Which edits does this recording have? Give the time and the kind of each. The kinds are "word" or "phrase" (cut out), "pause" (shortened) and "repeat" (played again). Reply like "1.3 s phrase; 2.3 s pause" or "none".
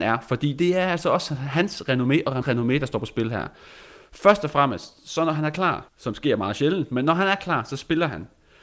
2.4 s word; 5.9 s pause